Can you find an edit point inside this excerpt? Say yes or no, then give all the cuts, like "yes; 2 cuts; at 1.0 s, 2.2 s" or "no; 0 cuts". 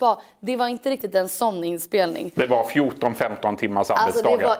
no; 0 cuts